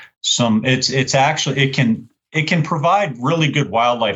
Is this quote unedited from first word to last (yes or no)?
yes